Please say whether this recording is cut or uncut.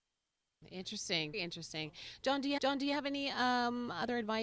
cut